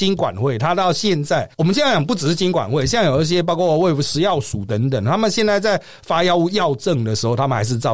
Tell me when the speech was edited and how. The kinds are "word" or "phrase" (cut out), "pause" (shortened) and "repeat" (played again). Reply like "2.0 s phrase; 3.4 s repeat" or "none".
1.5 s pause

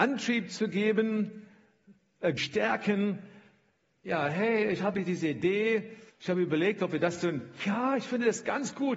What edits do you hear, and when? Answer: 2.4 s phrase; 6.1 s pause

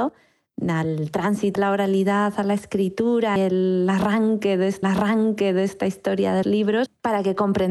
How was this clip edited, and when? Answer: 1.6 s word; 3.4 s word; 4.8 s repeat; 6.4 s word

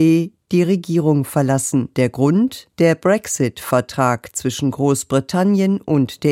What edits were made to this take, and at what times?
1.9 s pause; 2.7 s pause

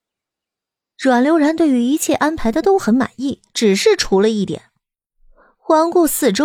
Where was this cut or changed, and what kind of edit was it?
3.5 s pause

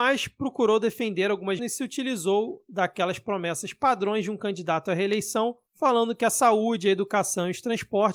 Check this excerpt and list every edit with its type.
1.6 s phrase

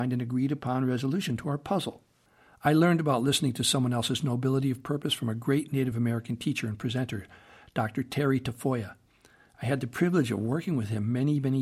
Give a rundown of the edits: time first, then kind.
none

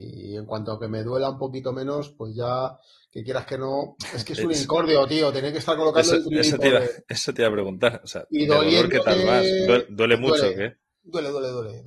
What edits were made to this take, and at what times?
none

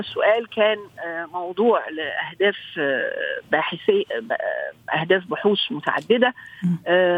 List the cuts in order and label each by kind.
none

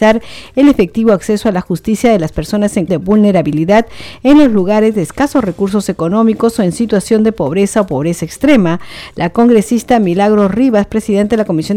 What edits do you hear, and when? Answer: 2.9 s word

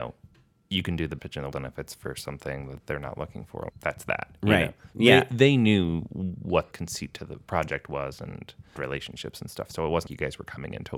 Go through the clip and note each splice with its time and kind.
1.2 s word; 1.5 s word; 3.7 s word; 6.7 s word; 8.8 s word; 10.1 s word

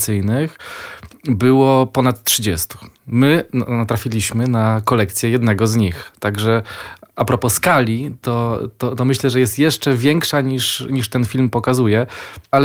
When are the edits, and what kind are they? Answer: 2.9 s pause

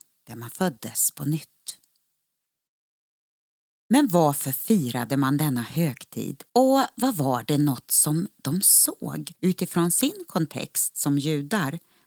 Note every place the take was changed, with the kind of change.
6.5 s pause; 9.4 s pause

